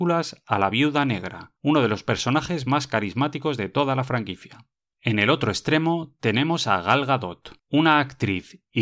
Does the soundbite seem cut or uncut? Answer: cut